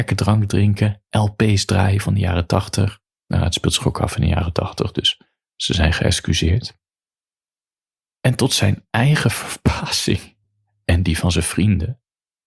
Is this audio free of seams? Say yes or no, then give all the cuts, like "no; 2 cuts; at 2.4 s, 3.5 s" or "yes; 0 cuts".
yes; 0 cuts